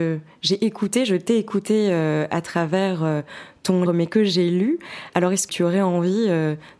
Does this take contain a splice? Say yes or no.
yes